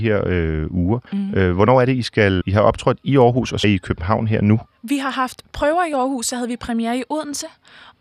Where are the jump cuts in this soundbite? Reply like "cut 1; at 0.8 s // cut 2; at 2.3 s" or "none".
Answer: cut 1; at 1.1 s // cut 2; at 2.4 s // cut 3; at 3.6 s